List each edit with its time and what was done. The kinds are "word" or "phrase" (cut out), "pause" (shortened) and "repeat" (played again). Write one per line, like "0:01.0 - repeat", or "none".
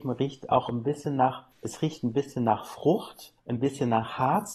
0:01.5 - pause
0:03.4 - pause